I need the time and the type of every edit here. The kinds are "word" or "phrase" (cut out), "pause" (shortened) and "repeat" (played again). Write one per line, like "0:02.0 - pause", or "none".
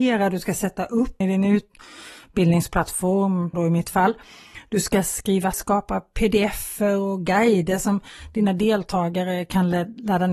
0:01.2 - word
0:03.5 - word
0:05.5 - word